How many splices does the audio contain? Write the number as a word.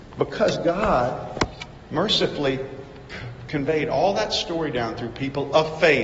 zero